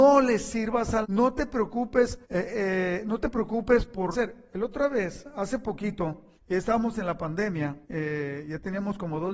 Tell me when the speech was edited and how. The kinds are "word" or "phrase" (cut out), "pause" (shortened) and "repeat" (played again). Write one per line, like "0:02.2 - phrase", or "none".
0:01.0 - word
0:02.2 - pause
0:04.1 - phrase
0:06.3 - pause
0:07.8 - pause